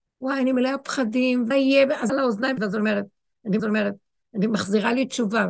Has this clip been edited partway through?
yes; 4 cuts; at 1.5 s, 2.1 s, 2.6 s, 3.6 s

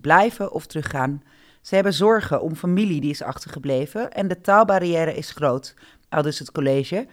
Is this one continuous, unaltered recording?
yes; 0 cuts

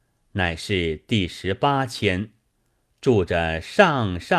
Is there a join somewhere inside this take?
no; 0 cuts

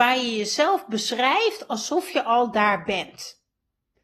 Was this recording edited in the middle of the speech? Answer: no; 0 cuts

